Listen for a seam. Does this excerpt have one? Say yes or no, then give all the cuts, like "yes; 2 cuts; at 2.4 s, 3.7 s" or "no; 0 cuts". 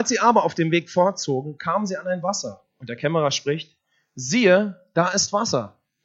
no; 0 cuts